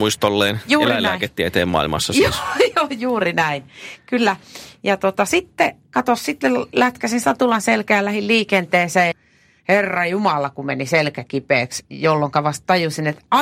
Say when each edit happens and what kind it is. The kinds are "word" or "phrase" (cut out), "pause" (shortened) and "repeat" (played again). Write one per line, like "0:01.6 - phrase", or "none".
0:09.1 - word

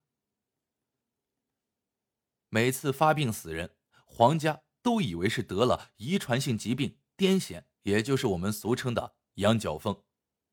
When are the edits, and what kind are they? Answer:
0:07.7 - pause

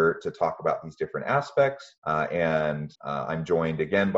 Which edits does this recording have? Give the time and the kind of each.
0:02.0 - pause
0:02.9 - pause

